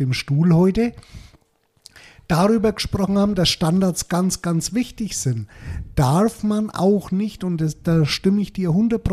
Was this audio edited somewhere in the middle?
no; 0 cuts

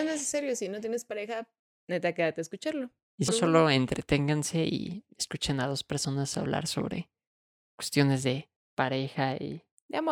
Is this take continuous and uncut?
no; 1 cut; at 3.3 s

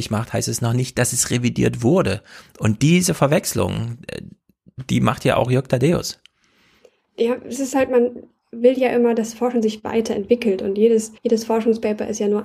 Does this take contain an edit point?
yes; 1 cut; at 11.2 s

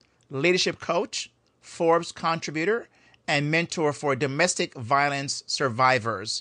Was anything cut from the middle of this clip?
no; 0 cuts

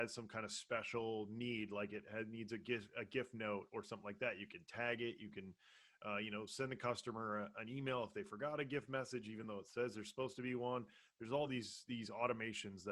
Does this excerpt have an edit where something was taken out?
no; 0 cuts

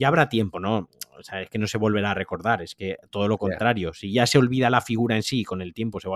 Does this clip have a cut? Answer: no; 0 cuts

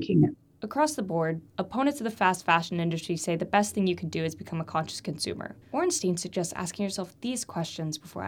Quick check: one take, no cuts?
no; 2 cuts; at 1.5 s, 5.6 s

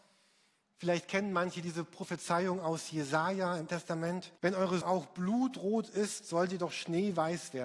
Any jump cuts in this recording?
yes; 3 cuts; at 3.7 s, 4.4 s, 4.8 s

